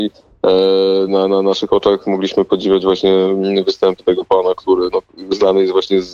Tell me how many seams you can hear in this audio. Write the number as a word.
zero